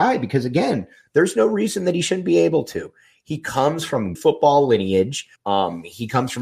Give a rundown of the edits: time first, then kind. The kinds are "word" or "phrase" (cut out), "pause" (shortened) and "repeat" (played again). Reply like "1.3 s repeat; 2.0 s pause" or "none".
4.2 s word; 5.4 s pause